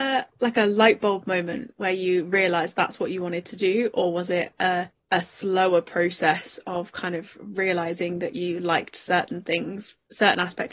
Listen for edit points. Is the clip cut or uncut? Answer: cut